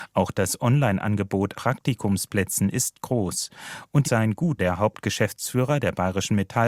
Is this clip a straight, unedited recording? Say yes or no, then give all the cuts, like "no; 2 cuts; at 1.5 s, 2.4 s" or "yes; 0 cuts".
no; 3 cuts; at 1.5 s, 4.0 s, 4.6 s